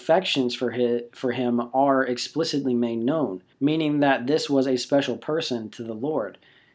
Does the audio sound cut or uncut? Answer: cut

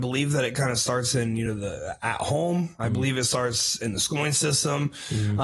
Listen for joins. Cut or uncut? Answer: uncut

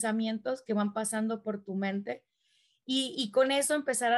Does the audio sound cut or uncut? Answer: uncut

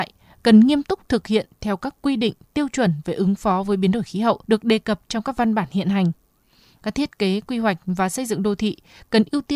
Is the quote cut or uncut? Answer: cut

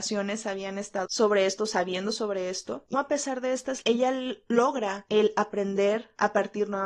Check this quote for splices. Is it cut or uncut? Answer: cut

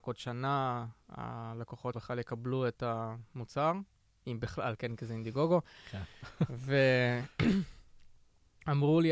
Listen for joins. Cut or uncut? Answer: cut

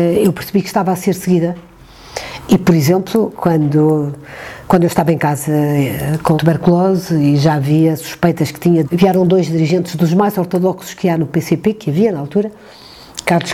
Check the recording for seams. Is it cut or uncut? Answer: cut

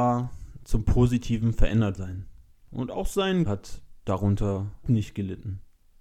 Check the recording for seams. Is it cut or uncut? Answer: cut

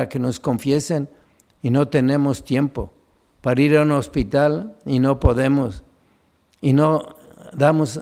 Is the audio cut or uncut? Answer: uncut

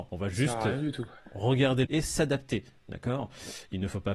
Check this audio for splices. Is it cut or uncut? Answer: cut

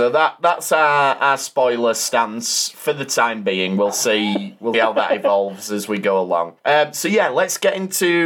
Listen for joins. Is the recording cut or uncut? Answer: cut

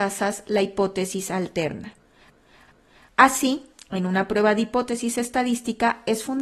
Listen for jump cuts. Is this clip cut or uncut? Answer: uncut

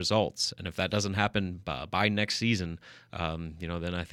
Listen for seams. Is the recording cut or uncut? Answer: uncut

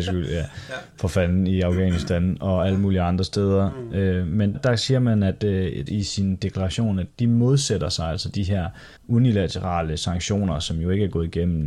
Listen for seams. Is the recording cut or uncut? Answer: cut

